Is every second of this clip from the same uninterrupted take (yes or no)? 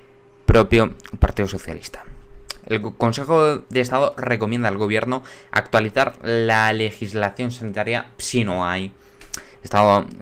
yes